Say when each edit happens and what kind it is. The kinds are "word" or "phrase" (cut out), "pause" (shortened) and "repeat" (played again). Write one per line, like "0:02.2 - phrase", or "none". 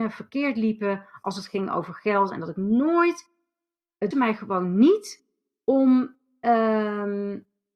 0:04.1 - word